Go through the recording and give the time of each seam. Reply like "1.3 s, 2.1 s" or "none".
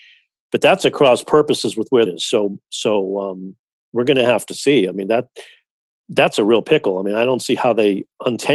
2.1 s

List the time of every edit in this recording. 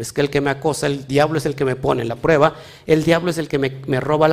none

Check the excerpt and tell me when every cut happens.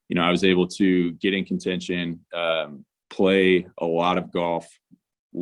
none

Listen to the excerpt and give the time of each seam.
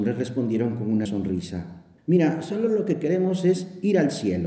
1.1 s, 2.0 s

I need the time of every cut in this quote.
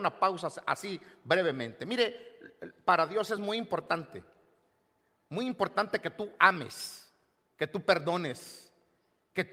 none

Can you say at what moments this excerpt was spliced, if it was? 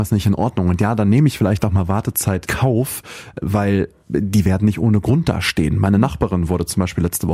2.5 s, 3.3 s

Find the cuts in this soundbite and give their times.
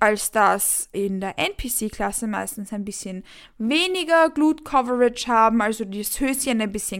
0.9 s

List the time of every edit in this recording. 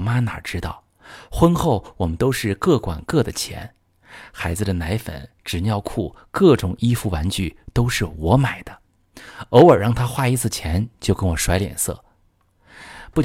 none

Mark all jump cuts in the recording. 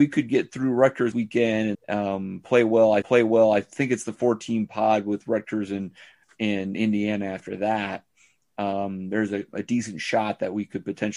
1.1 s, 1.7 s, 3.0 s

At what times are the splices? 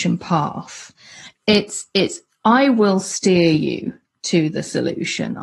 none

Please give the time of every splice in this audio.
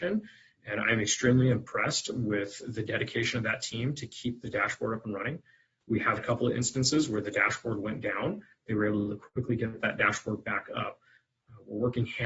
6.2 s

